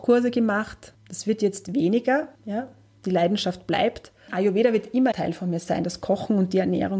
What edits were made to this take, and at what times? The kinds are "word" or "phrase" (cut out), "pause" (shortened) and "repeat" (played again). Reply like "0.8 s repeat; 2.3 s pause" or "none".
0.9 s pause; 2.3 s pause; 5.1 s phrase